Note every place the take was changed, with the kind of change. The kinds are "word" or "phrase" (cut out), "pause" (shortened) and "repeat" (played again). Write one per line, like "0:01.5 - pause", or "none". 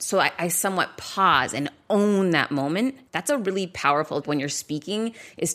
0:03.1 - pause
0:04.2 - word

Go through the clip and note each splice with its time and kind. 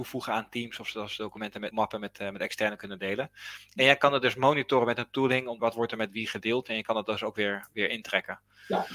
0:01.7 - word
0:05.6 - phrase

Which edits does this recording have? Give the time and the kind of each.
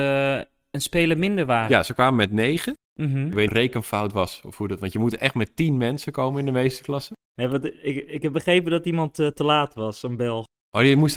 0:02.8 - pause
0:03.5 - phrase

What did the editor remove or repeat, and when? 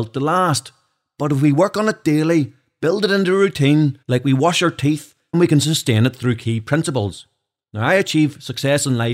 0:04.0 - pause
0:05.3 - word

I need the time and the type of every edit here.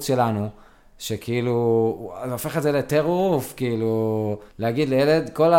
0:04.5 - pause

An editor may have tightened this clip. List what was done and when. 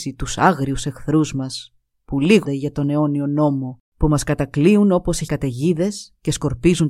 0:02.4 - word
0:03.8 - pause
0:05.3 - word

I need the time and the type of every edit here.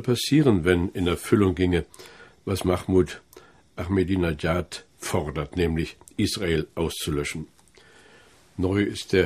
none

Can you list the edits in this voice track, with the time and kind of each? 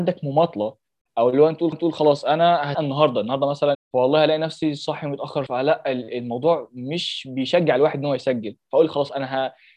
0:01.7 - repeat
0:02.7 - phrase
0:03.7 - phrase
0:05.5 - word

